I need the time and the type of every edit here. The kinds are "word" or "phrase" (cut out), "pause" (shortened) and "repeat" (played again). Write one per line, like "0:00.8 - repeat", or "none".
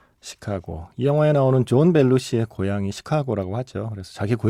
none